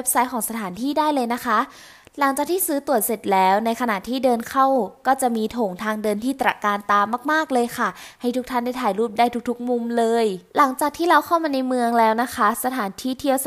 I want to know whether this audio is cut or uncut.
cut